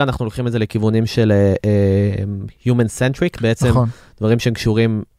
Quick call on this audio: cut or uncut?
uncut